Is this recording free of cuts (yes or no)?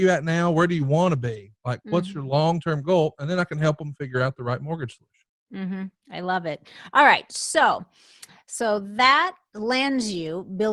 yes